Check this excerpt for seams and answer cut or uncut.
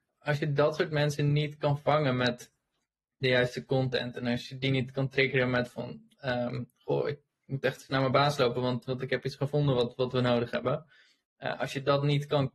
uncut